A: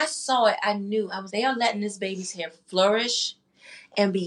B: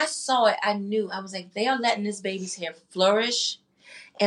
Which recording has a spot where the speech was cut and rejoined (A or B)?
A